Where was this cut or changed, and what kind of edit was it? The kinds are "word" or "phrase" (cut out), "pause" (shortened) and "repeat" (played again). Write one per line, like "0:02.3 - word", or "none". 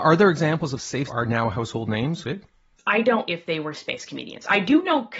0:01.1 - phrase
0:02.2 - phrase
0:03.3 - word
0:03.7 - word